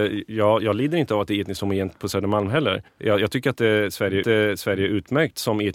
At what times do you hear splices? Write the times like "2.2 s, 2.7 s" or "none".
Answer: 2.9 s, 4.2 s